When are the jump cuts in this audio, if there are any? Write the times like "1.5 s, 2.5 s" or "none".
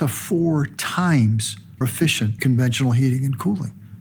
1.8 s, 2.4 s

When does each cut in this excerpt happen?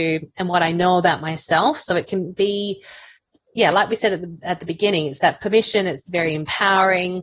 none

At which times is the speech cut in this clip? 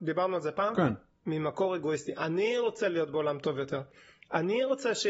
none

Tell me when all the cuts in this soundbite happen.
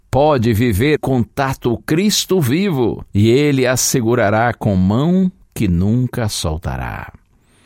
1.0 s, 1.8 s, 3.1 s

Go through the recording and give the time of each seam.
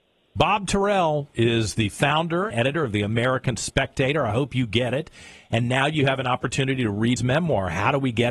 2.5 s, 7.2 s

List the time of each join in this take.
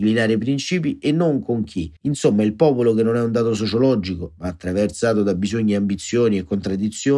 2.0 s

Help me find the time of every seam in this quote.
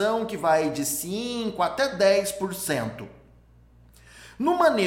none

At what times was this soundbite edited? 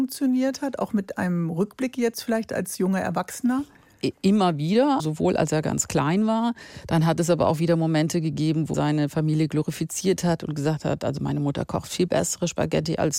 5.0 s, 8.7 s

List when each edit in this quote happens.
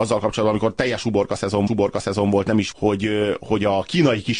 1.7 s, 2.7 s

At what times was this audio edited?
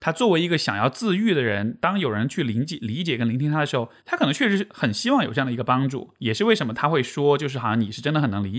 4.0 s

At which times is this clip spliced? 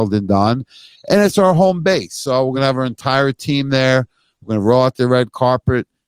none

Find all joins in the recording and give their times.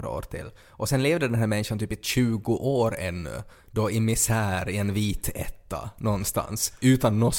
none

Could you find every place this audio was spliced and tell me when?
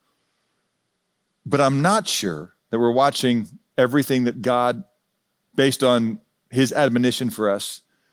5.3 s

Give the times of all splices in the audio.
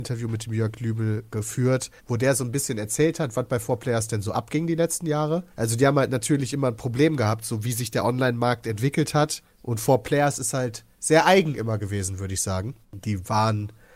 2.0 s, 5.5 s, 10.9 s, 12.8 s

